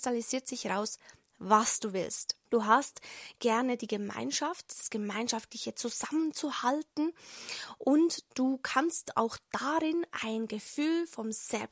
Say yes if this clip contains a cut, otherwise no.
yes